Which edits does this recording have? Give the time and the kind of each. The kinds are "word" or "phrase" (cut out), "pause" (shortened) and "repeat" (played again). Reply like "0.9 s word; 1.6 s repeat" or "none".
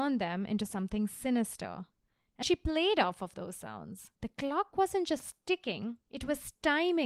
2.4 s word; 4.2 s pause; 6.0 s pause